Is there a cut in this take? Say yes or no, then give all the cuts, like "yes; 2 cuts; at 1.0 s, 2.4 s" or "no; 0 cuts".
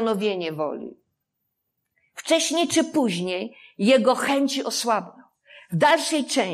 no; 0 cuts